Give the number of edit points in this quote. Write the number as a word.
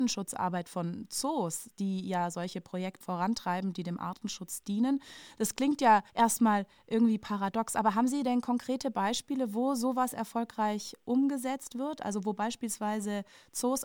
two